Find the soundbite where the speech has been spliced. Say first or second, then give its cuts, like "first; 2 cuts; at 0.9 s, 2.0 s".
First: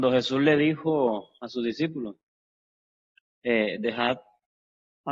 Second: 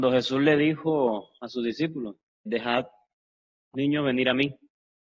second; 2 cuts; at 2.5 s, 3.7 s